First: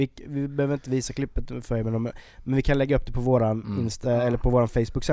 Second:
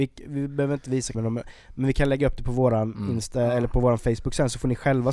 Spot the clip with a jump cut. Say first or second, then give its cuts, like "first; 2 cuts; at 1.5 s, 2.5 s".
second; 1 cut; at 1.1 s